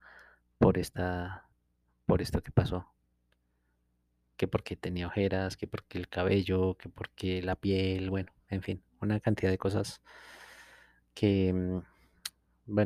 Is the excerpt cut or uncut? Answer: uncut